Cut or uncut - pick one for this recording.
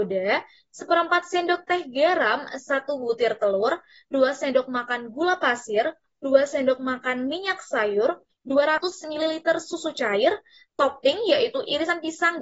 uncut